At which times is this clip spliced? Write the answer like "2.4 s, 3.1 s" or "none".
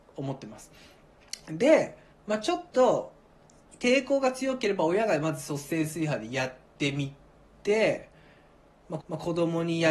2.1 s, 2.7 s, 9.0 s